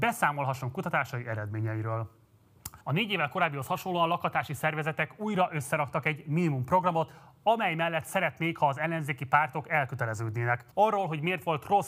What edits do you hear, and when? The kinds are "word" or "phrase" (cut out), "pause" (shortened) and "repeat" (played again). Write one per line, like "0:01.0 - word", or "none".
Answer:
0:02.8 - pause
0:10.7 - pause